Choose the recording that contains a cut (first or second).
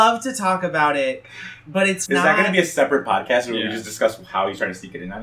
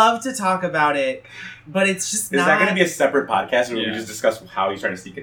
first